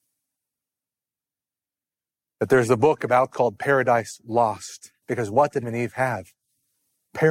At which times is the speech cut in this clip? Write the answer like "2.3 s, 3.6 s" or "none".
3.3 s, 5.0 s, 5.6 s

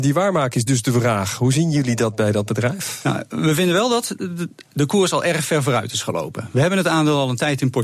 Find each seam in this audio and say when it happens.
none

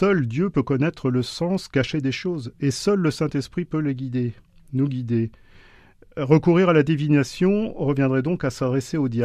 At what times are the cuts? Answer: none

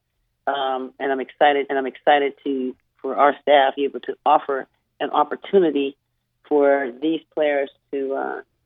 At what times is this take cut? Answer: 1.7 s, 3.8 s

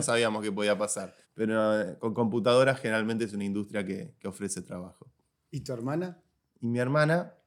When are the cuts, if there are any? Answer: 1.2 s

